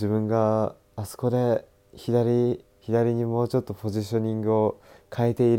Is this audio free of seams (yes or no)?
no